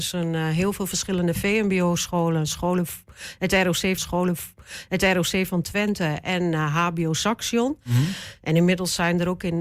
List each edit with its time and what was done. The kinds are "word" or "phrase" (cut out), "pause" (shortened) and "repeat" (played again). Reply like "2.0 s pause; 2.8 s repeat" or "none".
4.0 s repeat